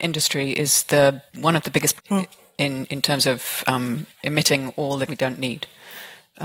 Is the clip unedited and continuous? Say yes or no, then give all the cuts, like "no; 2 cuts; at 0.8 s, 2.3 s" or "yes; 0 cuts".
no; 4 cuts; at 1.3 s, 2.0 s, 4.1 s, 5.1 s